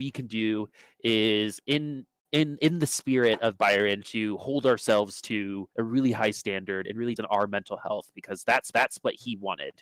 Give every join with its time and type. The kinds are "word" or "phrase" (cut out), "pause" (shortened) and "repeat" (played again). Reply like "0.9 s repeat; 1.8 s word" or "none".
5.7 s pause; 7.2 s phrase; 8.7 s repeat